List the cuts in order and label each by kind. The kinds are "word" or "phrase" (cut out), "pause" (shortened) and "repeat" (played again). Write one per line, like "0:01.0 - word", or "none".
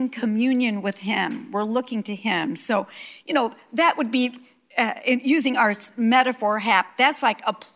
none

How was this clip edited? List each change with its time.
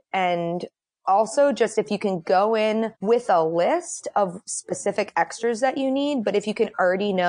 0:02.9 - pause

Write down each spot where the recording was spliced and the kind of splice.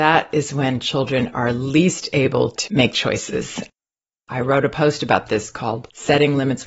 none

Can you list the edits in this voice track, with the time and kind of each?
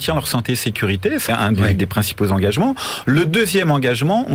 0:01.3 - word

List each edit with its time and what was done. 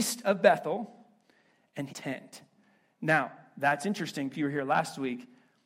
0:01.9 - phrase
0:04.3 - word

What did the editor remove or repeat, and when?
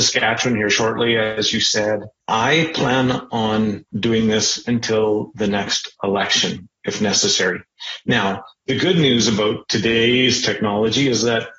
0:02.2 - pause
0:03.9 - pause

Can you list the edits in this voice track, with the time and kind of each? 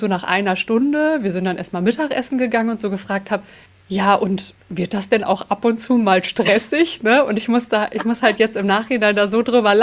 0:03.7 - pause
0:04.6 - pause

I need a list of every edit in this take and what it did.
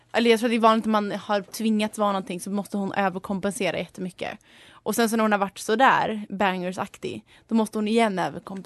none

